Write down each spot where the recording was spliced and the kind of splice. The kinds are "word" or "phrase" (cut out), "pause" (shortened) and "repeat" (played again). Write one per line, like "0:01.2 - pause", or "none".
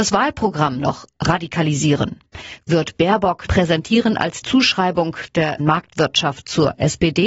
0:03.5 - phrase
0:04.4 - word
0:05.6 - word